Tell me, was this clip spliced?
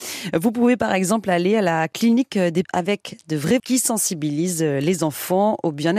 yes; 2 cuts; at 2.6 s, 3.6 s

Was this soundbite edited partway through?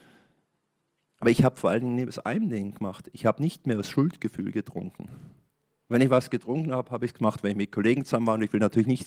no; 0 cuts

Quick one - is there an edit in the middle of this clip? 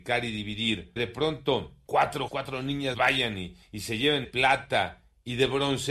yes; 5 cuts; at 1.0 s, 2.3 s, 2.9 s, 3.6 s, 4.2 s

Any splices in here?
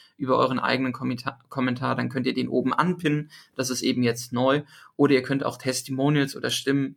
no; 0 cuts

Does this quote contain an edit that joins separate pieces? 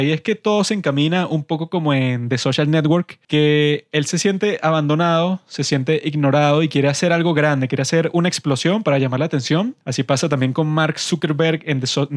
yes; 2 cuts; at 3.2 s, 9.8 s

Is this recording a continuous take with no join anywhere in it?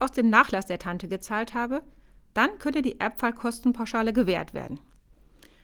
yes; 0 cuts

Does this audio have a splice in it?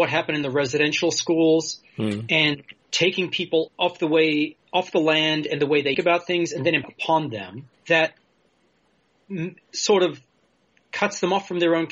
yes; 6 cuts; at 2.8 s, 3.7 s, 4.6 s, 5.9 s, 6.8 s, 7.8 s

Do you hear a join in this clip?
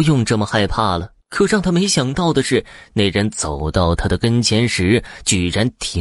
yes; 1 cut; at 1.2 s

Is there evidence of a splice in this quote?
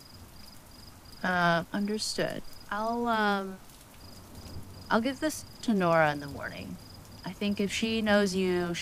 no; 0 cuts

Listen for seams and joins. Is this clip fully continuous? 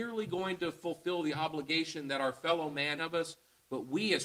no; 1 cut; at 3.0 s

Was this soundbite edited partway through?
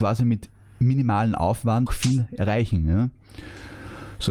yes; 1 cut; at 1.9 s

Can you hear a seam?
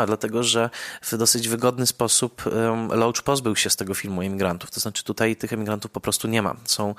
no; 0 cuts

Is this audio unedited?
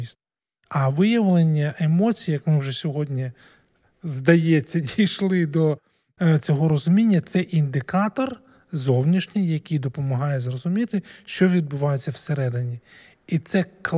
yes; 0 cuts

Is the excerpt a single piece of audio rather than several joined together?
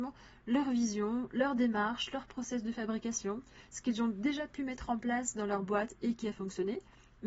yes; 0 cuts

